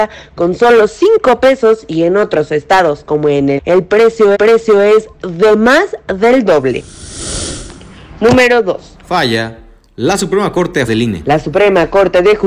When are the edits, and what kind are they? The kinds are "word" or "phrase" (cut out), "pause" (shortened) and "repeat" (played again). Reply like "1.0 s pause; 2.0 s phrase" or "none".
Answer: 3.6 s phrase; 4.3 s repeat; 10.9 s word